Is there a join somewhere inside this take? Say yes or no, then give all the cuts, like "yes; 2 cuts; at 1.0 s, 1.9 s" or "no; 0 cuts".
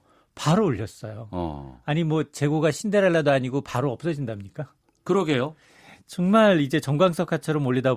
no; 0 cuts